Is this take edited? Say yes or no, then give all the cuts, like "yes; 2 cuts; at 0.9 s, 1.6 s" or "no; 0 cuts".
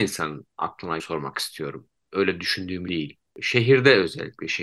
yes; 2 cuts; at 1.0 s, 2.9 s